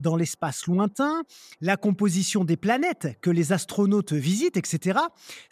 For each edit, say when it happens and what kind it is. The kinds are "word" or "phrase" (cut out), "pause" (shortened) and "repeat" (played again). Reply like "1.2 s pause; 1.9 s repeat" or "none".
none